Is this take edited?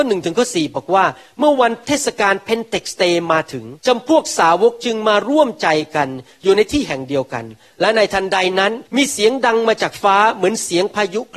yes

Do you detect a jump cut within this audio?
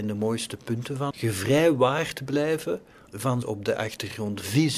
yes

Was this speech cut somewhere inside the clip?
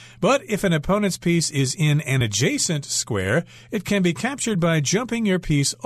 no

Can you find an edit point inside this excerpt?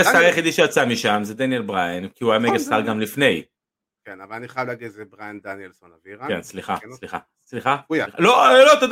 no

